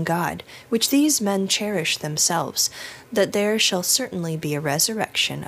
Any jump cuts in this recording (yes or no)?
no